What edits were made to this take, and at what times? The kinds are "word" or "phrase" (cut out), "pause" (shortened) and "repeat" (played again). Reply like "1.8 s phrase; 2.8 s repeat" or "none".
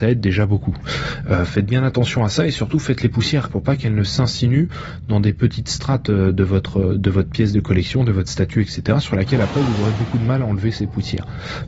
3.5 s word